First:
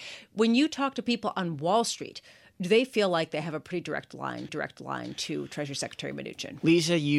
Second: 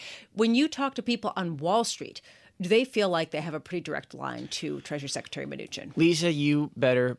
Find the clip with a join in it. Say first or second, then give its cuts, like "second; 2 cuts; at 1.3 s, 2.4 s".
first; 1 cut; at 4.5 s